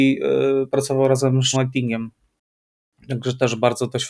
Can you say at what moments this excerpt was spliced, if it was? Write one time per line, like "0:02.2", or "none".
0:01.5